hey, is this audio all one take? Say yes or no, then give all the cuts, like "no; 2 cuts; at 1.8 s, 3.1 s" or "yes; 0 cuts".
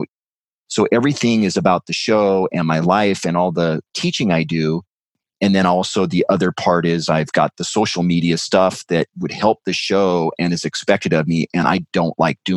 yes; 0 cuts